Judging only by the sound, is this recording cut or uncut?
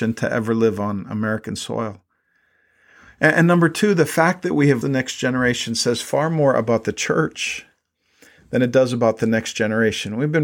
cut